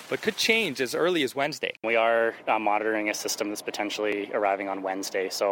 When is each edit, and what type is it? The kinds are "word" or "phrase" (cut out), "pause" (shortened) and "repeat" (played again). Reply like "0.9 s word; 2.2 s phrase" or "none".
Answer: 1.8 s pause

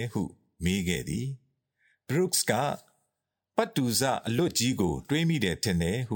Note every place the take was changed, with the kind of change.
none

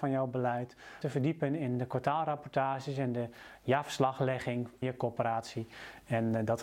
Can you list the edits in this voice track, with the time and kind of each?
1.0 s phrase; 4.8 s word

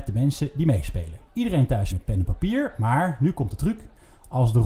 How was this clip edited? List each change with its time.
1.3 s pause; 1.9 s phrase

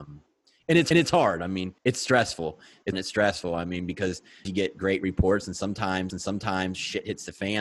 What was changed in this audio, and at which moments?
0.9 s repeat; 1.8 s pause; 2.9 s word; 4.4 s phrase; 6.1 s repeat

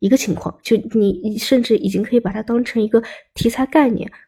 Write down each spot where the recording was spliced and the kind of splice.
none

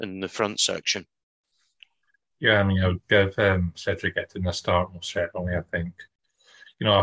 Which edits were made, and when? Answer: none

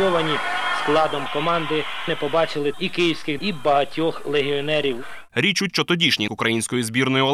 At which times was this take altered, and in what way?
2.1 s word; 2.7 s word; 3.4 s word; 5.7 s word; 6.3 s word

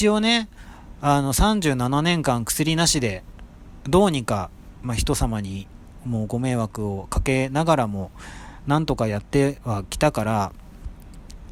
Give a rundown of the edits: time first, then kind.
none

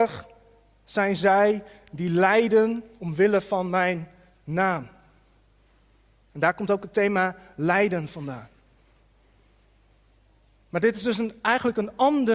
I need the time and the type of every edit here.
none

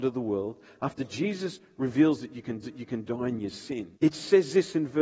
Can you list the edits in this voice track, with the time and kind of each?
2.6 s repeat; 3.9 s pause

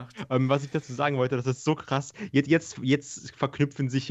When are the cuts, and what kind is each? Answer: none

